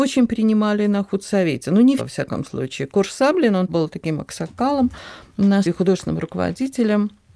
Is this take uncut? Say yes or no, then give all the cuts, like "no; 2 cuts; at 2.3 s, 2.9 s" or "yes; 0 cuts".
no; 3 cuts; at 2.0 s, 3.7 s, 5.6 s